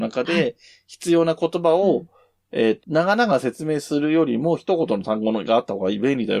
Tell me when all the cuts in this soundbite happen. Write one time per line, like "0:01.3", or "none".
0:02.8